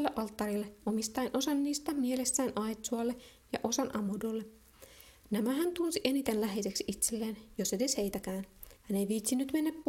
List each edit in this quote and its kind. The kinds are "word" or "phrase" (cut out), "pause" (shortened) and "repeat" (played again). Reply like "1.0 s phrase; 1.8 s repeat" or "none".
8.8 s pause